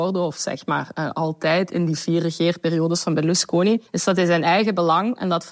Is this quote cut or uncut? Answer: cut